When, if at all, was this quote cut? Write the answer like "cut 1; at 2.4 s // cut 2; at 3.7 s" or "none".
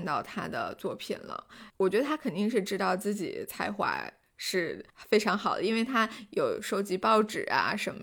cut 1; at 4.9 s